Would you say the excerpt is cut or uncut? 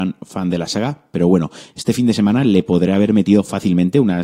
uncut